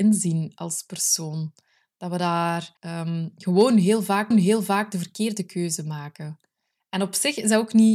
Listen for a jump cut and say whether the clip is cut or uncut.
cut